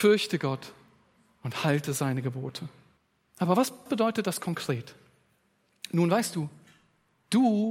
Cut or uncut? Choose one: cut